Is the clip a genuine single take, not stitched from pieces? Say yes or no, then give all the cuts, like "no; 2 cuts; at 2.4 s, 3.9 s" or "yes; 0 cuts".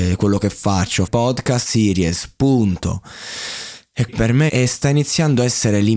no; 4 cuts; at 1.1 s, 1.7 s, 4.1 s, 4.5 s